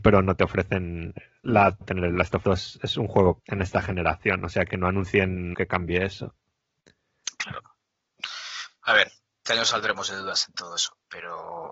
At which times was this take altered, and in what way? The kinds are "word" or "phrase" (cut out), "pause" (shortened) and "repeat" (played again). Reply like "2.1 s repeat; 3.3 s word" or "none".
1.8 s word; 2.4 s word; 3.4 s word; 4.7 s word; 5.5 s word; 9.4 s word